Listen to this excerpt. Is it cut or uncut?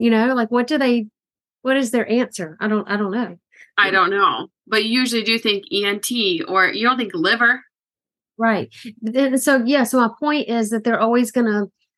uncut